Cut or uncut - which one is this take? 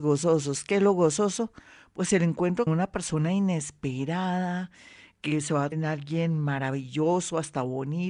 cut